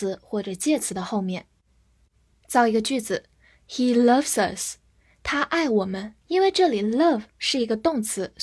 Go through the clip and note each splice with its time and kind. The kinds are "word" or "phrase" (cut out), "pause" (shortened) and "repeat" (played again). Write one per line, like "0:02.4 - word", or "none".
0:06.2 - pause